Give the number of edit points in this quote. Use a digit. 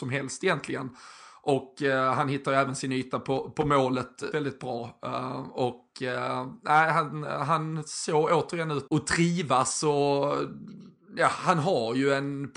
2